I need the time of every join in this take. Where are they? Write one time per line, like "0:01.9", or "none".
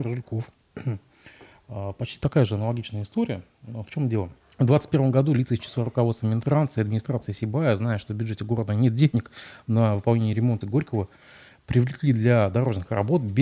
0:04.4
0:10.6

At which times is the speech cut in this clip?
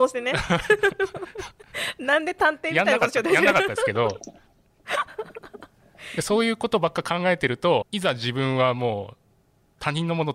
0:07.8

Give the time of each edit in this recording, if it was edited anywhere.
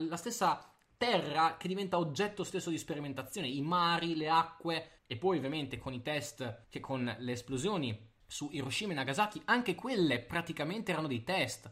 0:05.0
0:06.6
0:08.2

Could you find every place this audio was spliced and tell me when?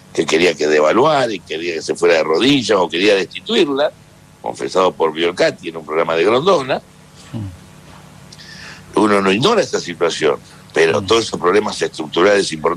none

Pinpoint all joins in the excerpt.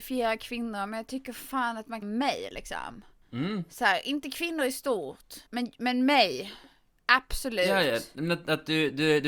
0:02.0
0:05.5

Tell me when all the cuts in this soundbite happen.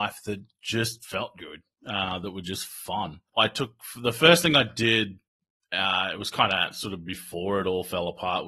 none

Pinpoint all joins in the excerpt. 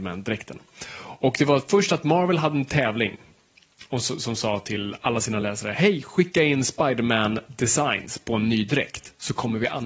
none

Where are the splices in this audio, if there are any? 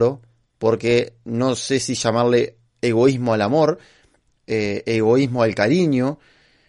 none

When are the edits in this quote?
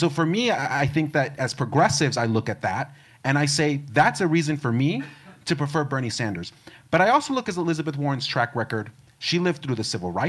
none

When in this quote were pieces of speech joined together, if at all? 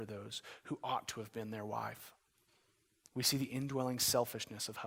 none

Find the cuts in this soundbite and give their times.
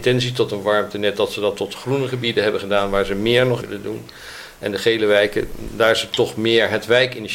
0:03.6

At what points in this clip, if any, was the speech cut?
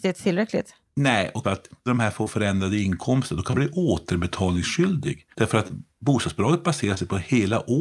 0:01.4
0:01.9
0:03.5
0:05.3

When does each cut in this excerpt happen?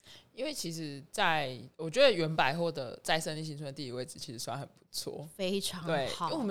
0:01.7

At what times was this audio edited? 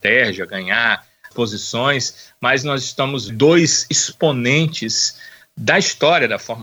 0:01.3
0:03.3

